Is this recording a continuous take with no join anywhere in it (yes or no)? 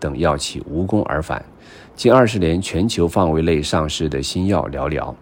yes